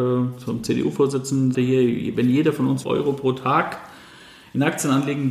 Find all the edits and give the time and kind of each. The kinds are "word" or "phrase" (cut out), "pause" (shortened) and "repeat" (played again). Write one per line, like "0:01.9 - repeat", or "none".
0:01.5 - word
0:02.8 - word